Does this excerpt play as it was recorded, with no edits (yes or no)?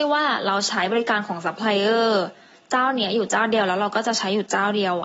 yes